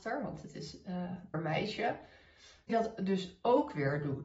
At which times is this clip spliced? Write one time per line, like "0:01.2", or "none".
0:01.3
0:02.7